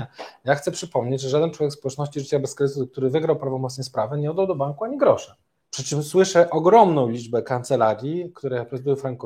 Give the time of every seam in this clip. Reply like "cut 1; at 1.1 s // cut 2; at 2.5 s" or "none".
cut 1; at 5.6 s